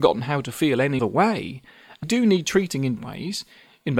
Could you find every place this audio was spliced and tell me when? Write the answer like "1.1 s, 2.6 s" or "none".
1.0 s, 2.0 s, 3.0 s